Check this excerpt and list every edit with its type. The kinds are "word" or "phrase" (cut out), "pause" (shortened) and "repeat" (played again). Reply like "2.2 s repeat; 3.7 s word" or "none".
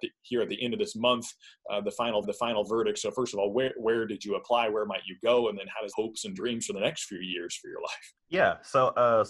2.2 s repeat; 5.9 s phrase; 8.2 s pause